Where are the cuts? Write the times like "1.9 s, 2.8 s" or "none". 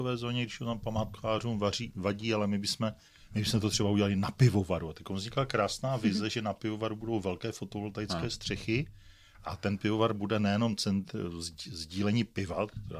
none